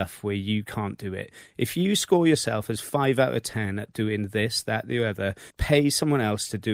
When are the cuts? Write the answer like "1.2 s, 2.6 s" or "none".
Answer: 5.5 s